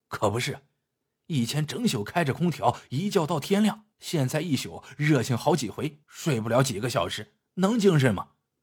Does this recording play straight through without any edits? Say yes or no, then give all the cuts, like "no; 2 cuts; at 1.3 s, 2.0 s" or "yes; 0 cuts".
no; 2 cuts; at 3.9 s, 6.0 s